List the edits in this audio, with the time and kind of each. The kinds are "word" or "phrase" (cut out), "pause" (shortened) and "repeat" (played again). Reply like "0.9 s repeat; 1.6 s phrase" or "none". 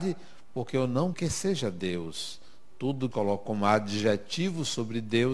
1.1 s phrase; 3.1 s phrase